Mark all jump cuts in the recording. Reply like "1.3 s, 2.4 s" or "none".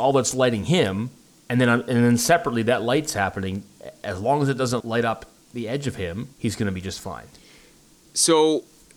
1.2 s, 4.8 s, 6.3 s